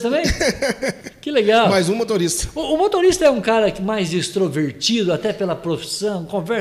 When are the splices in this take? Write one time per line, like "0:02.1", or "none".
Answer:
none